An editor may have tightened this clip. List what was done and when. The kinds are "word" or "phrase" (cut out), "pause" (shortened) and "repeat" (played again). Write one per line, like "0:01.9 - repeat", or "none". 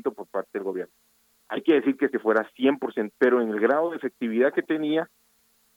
0:02.1 - phrase
0:03.1 - word